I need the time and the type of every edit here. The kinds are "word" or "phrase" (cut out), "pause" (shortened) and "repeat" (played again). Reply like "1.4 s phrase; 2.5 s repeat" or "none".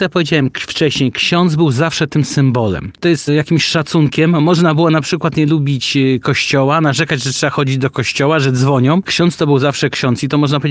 3.3 s word; 9.0 s word